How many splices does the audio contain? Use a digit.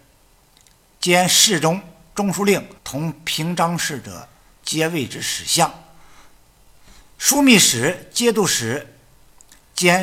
1